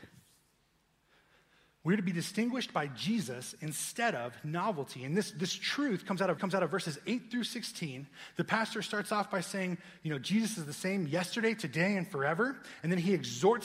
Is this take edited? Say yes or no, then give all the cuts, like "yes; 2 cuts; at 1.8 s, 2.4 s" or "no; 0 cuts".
yes; 1 cut; at 6.4 s